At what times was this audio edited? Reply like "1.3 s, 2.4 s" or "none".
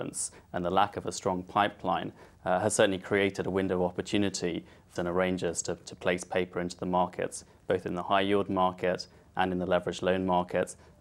5.0 s